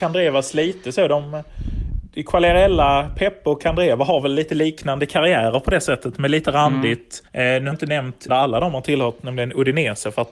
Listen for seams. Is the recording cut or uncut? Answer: cut